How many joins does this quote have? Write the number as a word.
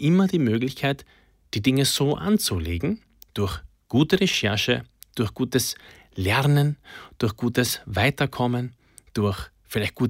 zero